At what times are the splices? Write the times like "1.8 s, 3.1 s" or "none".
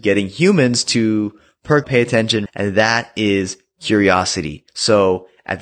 1.8 s, 2.5 s, 4.7 s